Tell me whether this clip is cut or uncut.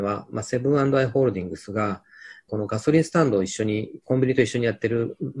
cut